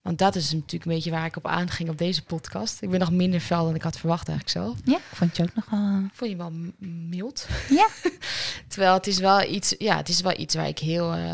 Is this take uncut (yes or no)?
yes